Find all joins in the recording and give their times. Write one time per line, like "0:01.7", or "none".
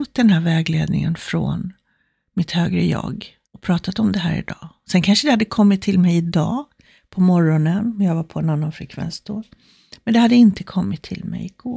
0:03.4

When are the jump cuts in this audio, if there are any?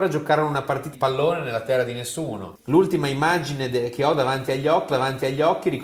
0:00.9
0:04.9

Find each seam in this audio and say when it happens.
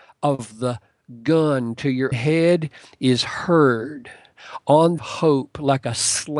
0:02.1
0:05.0

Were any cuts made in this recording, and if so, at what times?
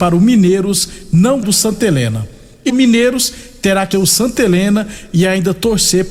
0:01.4
0:02.7
0:03.9

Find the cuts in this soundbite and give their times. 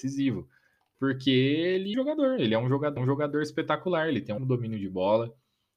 0:01.9
0:03.0
0:04.4

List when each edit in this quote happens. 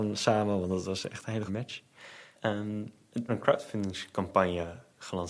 0:01.5
0:03.3

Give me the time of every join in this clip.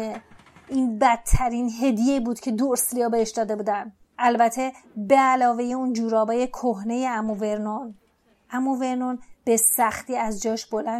none

